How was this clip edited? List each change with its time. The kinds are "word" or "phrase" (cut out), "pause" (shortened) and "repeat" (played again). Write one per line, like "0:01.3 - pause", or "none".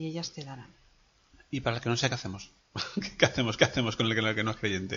0:02.1 - word
0:03.6 - repeat